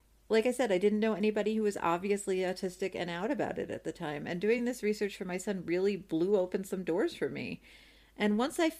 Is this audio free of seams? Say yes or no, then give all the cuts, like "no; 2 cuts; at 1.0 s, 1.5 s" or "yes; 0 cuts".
yes; 0 cuts